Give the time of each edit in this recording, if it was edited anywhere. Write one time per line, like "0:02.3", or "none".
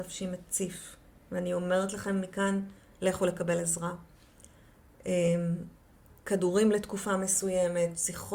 none